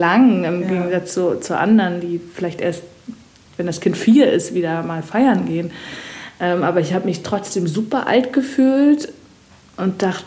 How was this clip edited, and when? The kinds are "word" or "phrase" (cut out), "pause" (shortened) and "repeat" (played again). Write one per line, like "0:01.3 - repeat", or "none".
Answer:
none